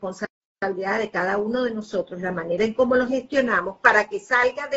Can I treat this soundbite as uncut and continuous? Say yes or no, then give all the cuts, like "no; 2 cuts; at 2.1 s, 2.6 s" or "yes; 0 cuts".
yes; 0 cuts